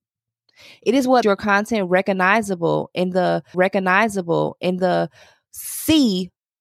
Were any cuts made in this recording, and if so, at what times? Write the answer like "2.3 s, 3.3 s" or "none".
1.2 s, 3.5 s